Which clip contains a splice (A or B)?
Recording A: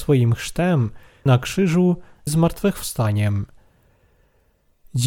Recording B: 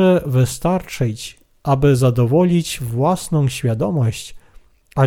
A